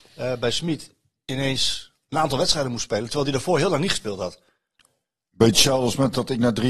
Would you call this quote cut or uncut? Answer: uncut